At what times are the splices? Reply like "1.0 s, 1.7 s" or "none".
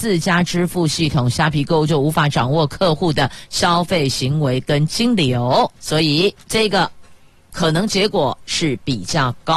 5.8 s, 6.4 s, 7.3 s